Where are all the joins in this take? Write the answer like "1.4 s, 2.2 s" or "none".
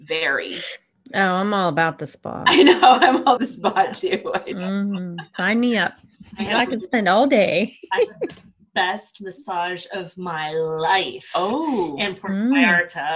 3.4 s